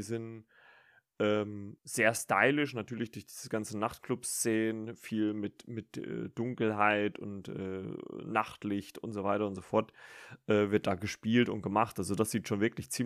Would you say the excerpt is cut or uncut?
cut